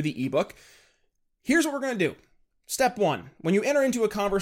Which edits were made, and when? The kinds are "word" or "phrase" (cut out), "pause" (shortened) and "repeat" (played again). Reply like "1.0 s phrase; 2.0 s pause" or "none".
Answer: none